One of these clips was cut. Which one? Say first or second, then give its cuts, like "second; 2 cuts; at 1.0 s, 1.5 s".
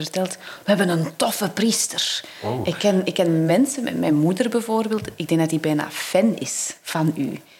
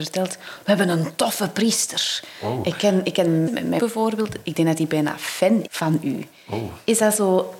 second; 3 cuts; at 3.5 s, 3.8 s, 5.7 s